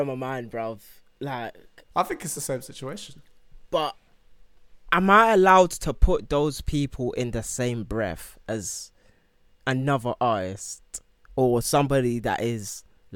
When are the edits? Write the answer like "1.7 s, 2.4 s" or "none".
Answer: none